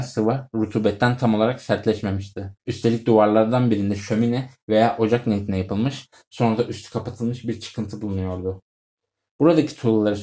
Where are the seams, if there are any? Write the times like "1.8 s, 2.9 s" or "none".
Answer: 2.6 s